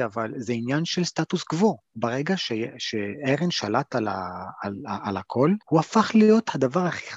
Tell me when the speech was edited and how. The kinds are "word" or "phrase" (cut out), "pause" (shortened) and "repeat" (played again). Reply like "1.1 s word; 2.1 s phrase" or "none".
5.6 s pause